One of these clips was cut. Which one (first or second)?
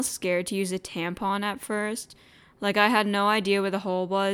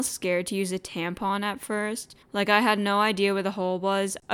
second